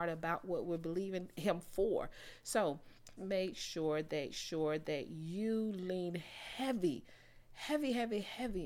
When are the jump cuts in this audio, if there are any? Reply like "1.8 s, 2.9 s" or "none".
3.2 s, 4.3 s